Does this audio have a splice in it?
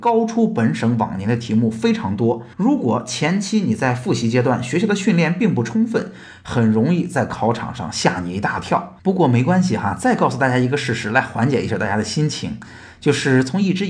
yes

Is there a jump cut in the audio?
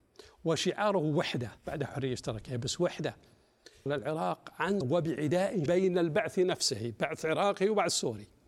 yes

